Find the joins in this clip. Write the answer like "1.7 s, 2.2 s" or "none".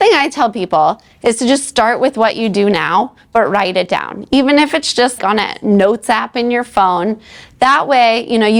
5.2 s

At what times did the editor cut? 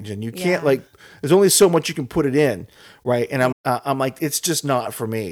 3.5 s

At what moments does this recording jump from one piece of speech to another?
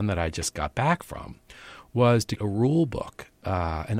2.4 s

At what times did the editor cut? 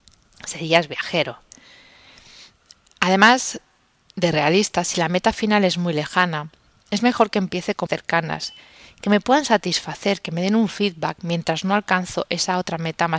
7.9 s

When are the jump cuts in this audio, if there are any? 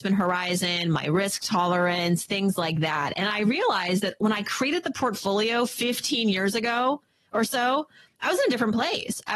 none

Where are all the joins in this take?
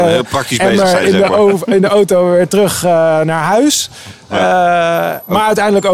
none

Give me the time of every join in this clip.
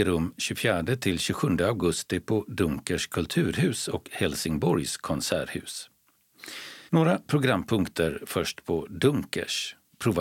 6.9 s

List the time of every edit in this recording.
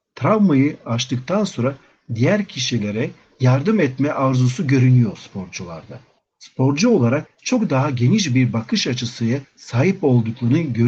none

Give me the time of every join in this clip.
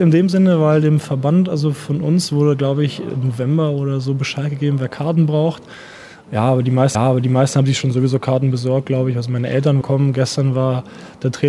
6.9 s, 9.8 s

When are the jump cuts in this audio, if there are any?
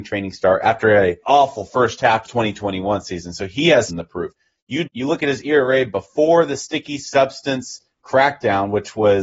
1.2 s, 2.3 s, 3.9 s, 4.9 s

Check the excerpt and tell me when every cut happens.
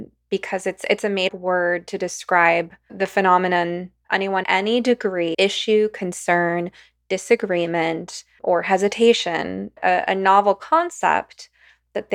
1.3 s, 2.9 s, 4.0 s, 4.4 s, 5.3 s, 8.4 s, 9.8 s

